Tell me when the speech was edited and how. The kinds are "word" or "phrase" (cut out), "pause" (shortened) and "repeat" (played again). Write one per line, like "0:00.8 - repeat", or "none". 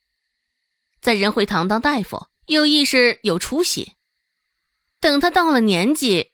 0:02.4 - pause